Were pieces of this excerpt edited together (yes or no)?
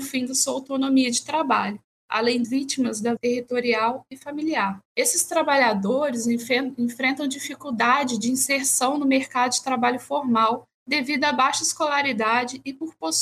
yes